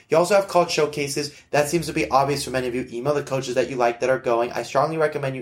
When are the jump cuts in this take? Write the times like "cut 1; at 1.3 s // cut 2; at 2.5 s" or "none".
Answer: none

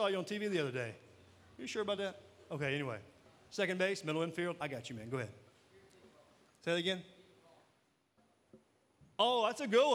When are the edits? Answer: none

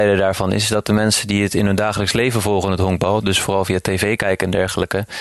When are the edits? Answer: none

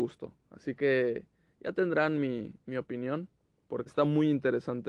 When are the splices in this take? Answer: cut 1; at 3.9 s

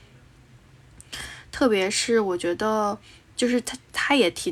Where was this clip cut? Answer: cut 1; at 3.3 s

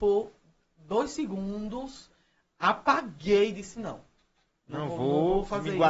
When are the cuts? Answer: none

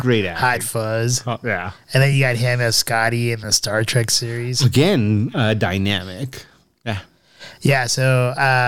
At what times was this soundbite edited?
none

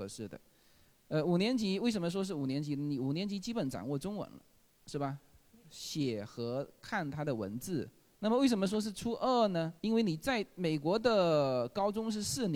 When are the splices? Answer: cut 1; at 8.1 s // cut 2; at 9.8 s

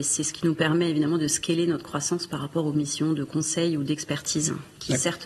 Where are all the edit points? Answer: none

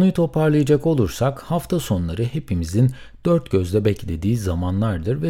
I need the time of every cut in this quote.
none

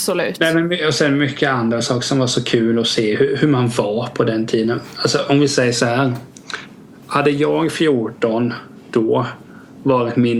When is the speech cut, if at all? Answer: none

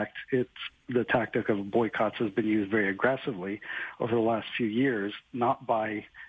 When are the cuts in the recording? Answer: none

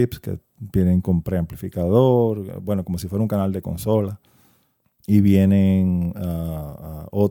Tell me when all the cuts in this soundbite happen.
none

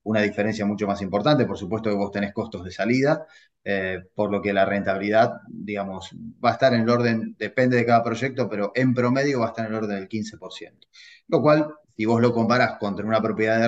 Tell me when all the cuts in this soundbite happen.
none

